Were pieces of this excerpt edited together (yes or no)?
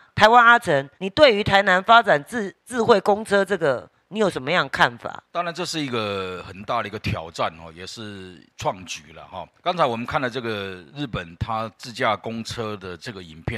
yes